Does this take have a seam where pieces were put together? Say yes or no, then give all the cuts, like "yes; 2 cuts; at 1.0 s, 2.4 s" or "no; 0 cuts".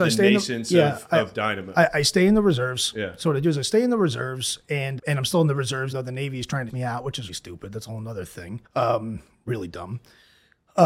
yes; 5 cuts; at 5.0 s, 5.9 s, 6.7 s, 7.3 s, 8.6 s